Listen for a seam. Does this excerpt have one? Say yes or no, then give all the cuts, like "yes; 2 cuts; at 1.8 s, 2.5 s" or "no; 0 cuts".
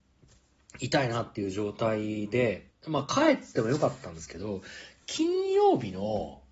yes; 1 cut; at 2.7 s